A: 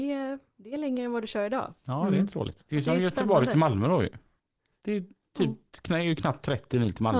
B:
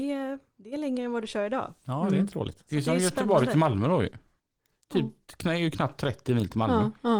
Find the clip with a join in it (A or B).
B